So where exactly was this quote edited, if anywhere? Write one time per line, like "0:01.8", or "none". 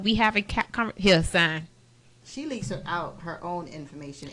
none